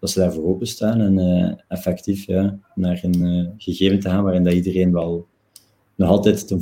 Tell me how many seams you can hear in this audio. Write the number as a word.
zero